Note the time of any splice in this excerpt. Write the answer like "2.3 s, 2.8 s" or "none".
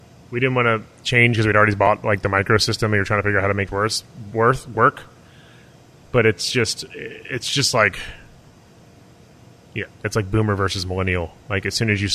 3.7 s